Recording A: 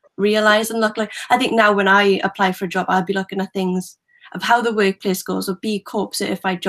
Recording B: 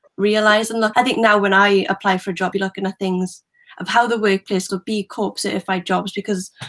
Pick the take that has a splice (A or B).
B